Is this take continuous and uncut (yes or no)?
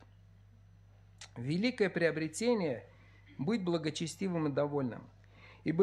yes